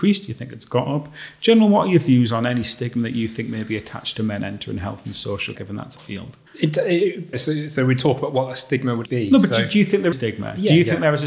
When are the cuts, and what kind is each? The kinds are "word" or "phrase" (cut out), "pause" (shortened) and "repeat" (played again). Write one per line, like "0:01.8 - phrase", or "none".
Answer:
0:05.6 - phrase
0:06.0 - word
0:06.5 - pause
0:07.3 - word
0:09.0 - word
0:10.1 - phrase